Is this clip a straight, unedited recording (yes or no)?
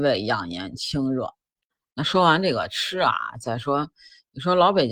yes